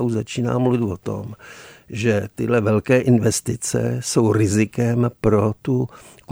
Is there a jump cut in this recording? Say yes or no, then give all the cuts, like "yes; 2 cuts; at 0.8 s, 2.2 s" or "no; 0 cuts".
no; 0 cuts